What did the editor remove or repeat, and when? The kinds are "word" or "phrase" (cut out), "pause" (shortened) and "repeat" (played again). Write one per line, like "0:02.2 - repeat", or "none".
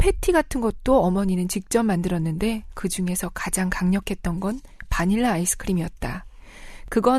none